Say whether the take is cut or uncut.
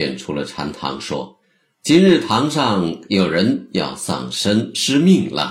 cut